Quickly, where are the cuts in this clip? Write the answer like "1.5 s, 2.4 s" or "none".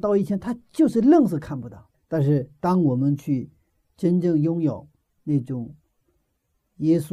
none

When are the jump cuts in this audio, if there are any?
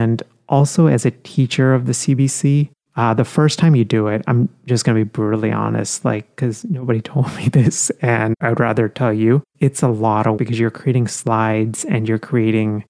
10.4 s

